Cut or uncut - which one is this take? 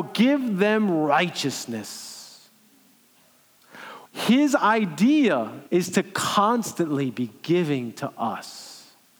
cut